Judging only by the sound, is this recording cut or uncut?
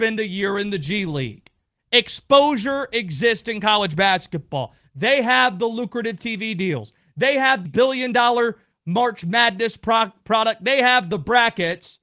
cut